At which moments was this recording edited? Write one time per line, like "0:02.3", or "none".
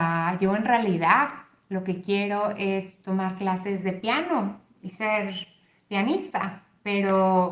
none